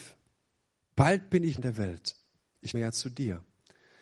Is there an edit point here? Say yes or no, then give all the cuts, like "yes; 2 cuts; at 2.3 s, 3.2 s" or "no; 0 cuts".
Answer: yes; 2 cuts; at 1.6 s, 2.7 s